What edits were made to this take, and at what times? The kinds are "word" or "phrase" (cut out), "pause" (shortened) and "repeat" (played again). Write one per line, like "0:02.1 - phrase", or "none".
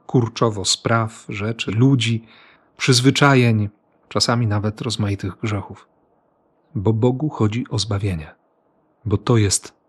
0:01.7 - word